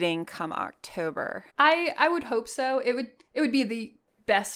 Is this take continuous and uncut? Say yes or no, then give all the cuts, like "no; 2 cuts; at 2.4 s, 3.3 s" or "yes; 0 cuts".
no; 1 cut; at 1.5 s